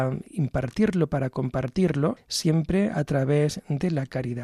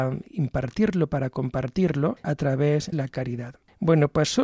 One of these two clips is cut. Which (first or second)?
second